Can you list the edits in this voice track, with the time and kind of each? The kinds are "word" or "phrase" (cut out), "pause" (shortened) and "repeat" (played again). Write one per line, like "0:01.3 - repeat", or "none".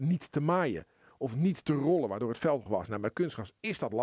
0:02.7 - word